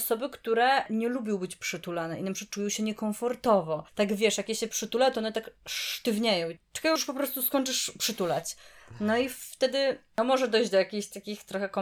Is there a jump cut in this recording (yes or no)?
yes